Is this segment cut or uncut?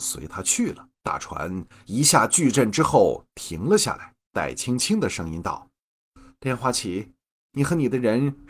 cut